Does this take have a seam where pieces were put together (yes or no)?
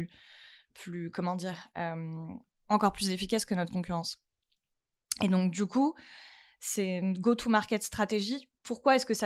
no